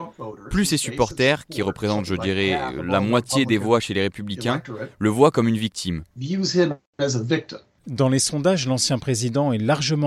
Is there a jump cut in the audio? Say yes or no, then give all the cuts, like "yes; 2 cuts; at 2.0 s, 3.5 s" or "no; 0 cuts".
yes; 1 cut; at 7.7 s